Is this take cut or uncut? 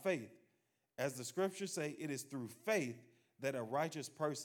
uncut